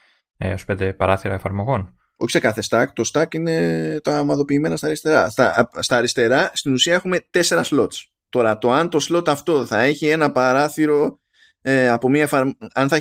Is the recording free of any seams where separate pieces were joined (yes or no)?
yes